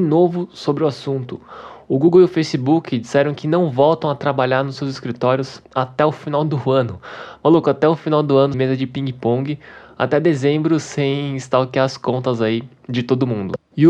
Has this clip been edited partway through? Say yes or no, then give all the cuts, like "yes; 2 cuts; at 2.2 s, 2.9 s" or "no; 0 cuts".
yes; 2 cuts; at 5.6 s, 8.5 s